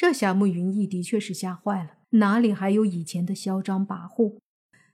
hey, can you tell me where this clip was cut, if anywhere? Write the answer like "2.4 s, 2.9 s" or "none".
2.0 s